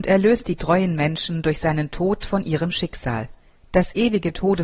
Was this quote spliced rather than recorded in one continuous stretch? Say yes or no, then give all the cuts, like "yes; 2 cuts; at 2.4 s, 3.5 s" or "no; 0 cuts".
yes; 1 cut; at 3.4 s